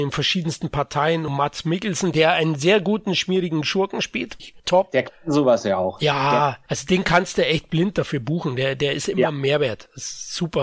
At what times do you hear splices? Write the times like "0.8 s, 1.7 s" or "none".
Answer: 4.4 s